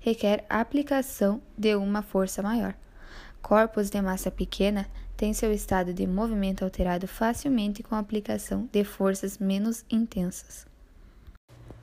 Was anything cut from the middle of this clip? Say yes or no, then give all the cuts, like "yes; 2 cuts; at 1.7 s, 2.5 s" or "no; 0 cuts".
no; 0 cuts